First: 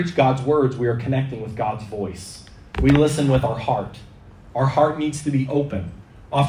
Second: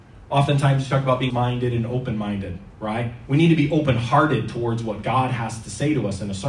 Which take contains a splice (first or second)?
second